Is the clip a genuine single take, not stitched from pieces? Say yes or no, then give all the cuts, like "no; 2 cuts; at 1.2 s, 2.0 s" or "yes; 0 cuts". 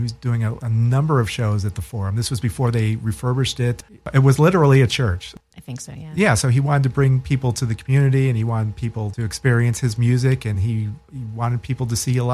yes; 0 cuts